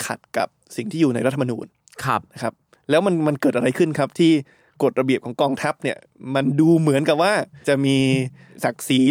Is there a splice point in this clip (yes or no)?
no